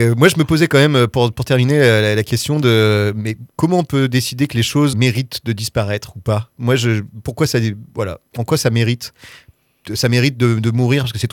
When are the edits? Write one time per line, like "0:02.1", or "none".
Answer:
0:03.5
0:04.9
0:07.9